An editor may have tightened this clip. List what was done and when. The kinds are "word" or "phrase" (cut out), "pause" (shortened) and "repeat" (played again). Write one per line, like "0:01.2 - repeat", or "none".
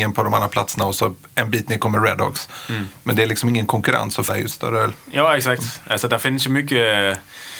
0:04.3 - word